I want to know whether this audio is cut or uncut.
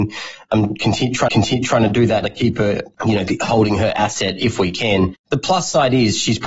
cut